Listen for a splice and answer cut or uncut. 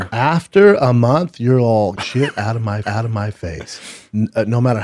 cut